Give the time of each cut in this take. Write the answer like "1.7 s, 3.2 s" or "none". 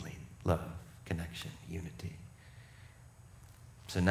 none